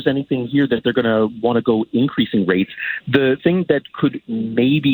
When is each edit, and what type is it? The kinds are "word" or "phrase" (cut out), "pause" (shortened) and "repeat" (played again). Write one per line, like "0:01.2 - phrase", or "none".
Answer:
0:03.4 - word